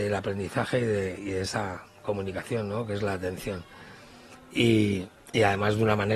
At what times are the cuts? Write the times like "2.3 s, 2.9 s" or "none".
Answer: none